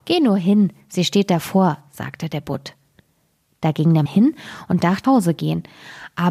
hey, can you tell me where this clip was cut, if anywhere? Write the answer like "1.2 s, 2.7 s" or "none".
4.1 s, 5.0 s